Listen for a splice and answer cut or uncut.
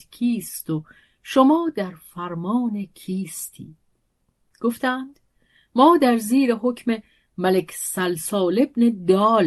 uncut